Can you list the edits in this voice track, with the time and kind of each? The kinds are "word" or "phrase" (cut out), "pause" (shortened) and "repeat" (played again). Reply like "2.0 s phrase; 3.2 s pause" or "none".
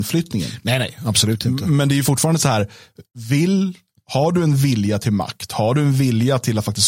none